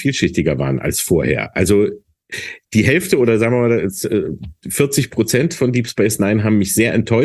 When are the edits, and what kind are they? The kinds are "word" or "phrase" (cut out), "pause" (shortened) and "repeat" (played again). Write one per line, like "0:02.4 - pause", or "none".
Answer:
none

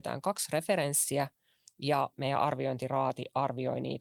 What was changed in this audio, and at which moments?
0:02.1 - word

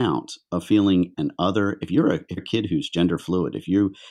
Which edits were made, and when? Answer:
0:01.1 - word
0:02.4 - word

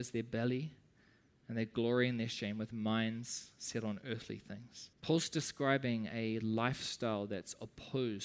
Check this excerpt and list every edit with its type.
0:04.9 - pause

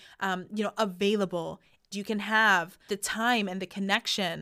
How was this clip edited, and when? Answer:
0:01.9 - word
0:02.9 - word

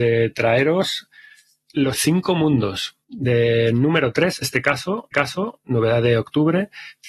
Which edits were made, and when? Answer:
0:01.9 - word
0:03.0 - pause
0:04.4 - word
0:05.1 - repeat

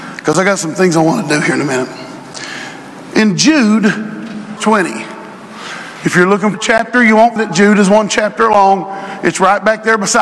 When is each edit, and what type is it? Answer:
0:04.6 - word
0:06.5 - word
0:07.4 - word

